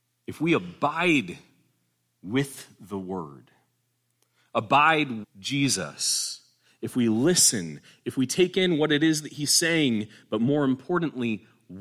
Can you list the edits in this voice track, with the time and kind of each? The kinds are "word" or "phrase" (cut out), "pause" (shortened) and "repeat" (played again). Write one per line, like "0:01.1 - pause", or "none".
0:05.2 - word

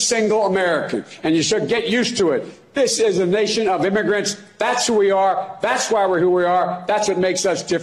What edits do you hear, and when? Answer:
none

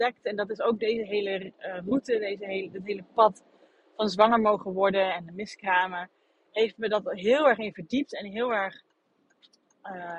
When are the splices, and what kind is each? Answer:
none

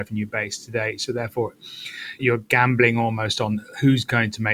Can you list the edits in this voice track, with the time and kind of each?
0:02.2 - word

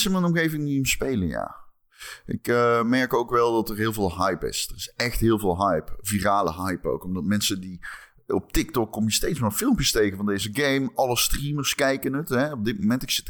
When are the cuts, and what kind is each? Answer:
none

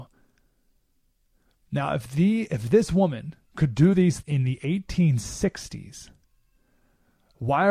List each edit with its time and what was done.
0:03.5 - pause
0:04.2 - word

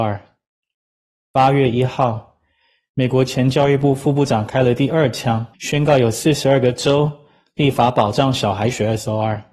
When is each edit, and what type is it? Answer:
0:05.5 - pause

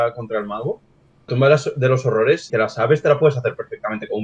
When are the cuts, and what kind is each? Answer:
0:01.3 - word
0:02.5 - word

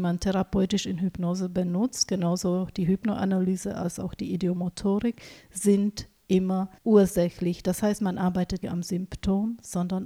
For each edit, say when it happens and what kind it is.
0:06.8 - pause
0:08.6 - word

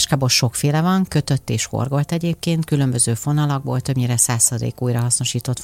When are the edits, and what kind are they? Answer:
none

